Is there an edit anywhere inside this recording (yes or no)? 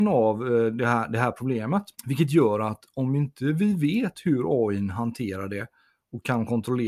yes